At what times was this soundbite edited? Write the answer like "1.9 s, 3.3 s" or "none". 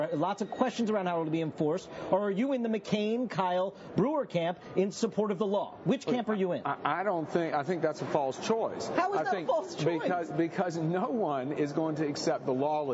none